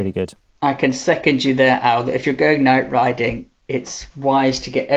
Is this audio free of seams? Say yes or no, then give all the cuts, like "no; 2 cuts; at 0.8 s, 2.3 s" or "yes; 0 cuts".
yes; 0 cuts